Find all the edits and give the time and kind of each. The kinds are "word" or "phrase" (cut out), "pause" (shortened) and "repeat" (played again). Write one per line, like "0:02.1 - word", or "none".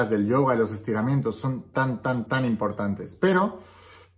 0:01.7 - word
0:02.3 - word